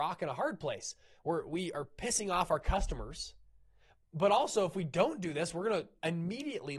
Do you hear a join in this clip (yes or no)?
no